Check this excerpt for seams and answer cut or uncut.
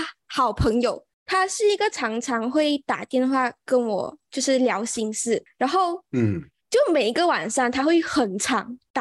uncut